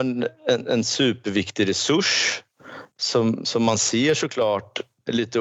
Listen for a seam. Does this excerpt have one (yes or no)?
no